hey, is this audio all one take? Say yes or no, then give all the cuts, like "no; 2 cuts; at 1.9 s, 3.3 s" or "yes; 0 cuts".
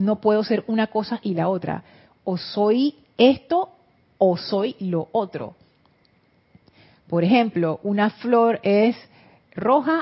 yes; 0 cuts